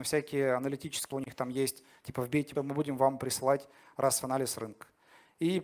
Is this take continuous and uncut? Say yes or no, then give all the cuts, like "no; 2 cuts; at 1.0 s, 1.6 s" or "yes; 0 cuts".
no; 3 cuts; at 1.1 s, 2.5 s, 4.2 s